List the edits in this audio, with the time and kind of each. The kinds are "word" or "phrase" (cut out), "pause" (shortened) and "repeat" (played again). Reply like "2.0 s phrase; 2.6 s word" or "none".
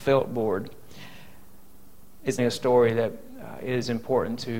2.4 s word